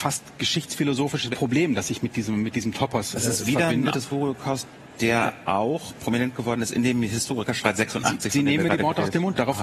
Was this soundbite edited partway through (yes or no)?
yes